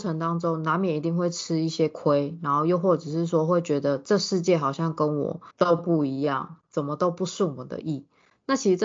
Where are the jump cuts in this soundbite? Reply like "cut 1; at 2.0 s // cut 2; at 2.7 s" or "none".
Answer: cut 1; at 5.5 s

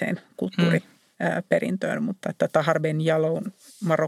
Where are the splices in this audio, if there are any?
none

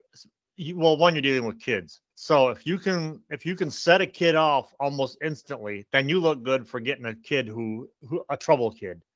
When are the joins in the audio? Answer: cut 1; at 2.1 s

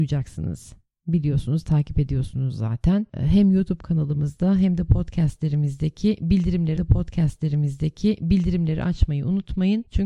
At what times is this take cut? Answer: cut 1; at 6.8 s

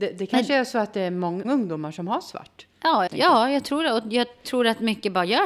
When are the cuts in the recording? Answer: cut 1; at 1.4 s // cut 2; at 3.1 s

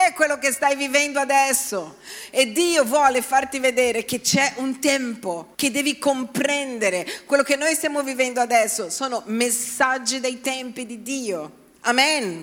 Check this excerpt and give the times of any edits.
cut 1; at 5.5 s

